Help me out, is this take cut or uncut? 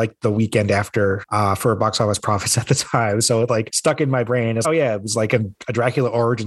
cut